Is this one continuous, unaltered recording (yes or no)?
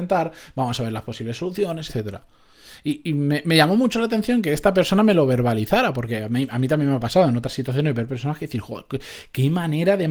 no